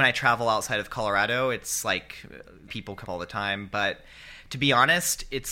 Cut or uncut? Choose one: cut